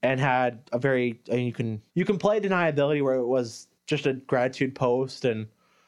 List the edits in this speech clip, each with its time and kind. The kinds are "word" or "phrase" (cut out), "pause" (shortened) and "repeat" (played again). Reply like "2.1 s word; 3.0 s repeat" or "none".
1.9 s pause; 3.8 s pause